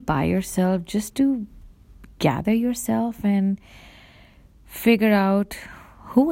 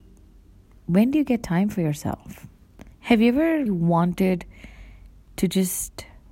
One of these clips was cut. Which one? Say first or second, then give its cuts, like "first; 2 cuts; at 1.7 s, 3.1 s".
second; 2 cuts; at 2.9 s, 3.7 s